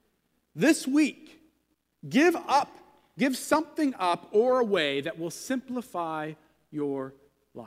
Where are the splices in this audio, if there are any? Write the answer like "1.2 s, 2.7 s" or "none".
none

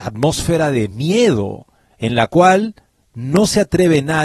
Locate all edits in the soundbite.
none

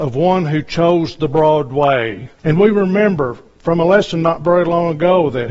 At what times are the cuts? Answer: 2.4 s

